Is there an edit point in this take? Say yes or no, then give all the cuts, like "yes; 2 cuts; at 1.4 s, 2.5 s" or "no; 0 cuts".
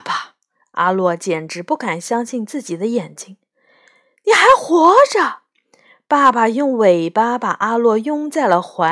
no; 0 cuts